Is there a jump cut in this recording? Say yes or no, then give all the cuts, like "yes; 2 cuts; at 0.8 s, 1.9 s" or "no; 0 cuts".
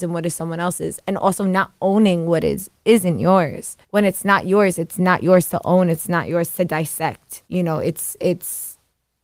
yes; 2 cuts; at 3.8 s, 7.4 s